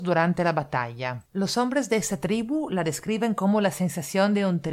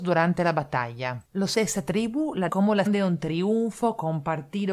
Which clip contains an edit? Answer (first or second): second